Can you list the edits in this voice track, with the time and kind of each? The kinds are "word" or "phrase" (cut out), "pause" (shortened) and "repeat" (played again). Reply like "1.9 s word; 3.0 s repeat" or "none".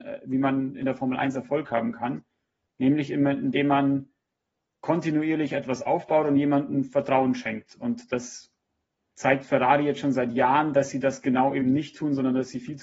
none